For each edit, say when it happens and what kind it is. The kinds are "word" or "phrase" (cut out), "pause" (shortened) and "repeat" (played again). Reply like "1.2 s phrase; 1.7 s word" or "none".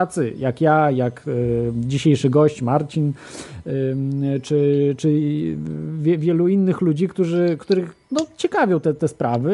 8.0 s pause